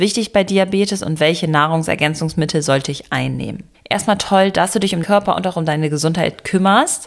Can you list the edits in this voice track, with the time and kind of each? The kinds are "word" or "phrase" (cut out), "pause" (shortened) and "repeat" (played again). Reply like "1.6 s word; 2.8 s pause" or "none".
5.0 s word